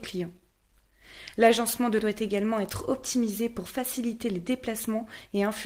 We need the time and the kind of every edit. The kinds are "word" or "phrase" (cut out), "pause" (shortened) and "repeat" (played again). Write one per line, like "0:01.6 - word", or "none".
0:02.0 - word